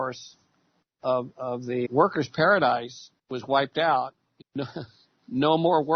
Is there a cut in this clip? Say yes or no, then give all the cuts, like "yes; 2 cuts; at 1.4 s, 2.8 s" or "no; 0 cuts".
yes; 3 cuts; at 1.8 s, 3.2 s, 4.4 s